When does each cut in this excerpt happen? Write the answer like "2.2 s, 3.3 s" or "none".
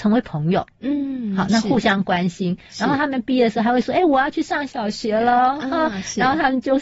none